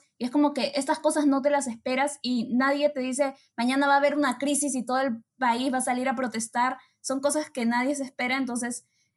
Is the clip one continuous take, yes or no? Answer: yes